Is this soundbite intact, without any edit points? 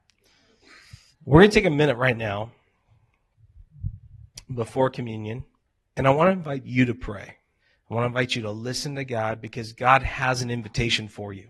no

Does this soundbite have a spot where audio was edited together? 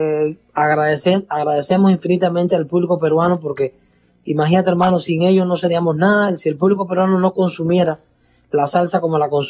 no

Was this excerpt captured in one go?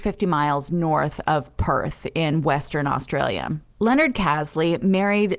yes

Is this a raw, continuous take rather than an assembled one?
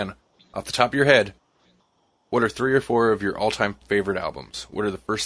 yes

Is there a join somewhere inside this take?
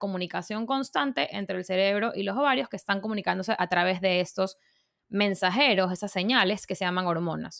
no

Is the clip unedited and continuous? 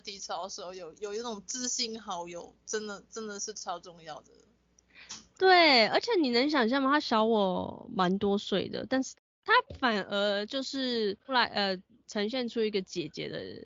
yes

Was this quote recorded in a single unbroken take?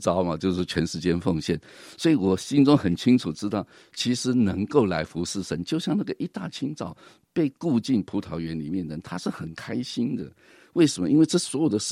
yes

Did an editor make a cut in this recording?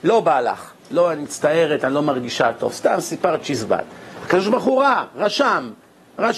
no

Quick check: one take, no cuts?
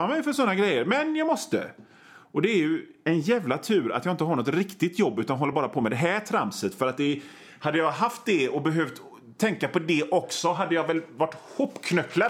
yes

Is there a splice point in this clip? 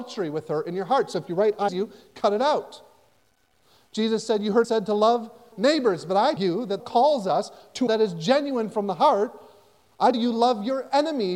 yes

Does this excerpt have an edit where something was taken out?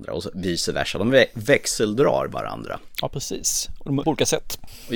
yes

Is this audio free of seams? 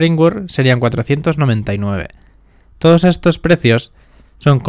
yes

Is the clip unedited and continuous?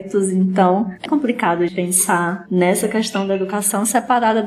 no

